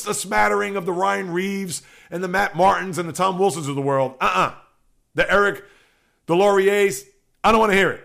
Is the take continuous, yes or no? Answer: yes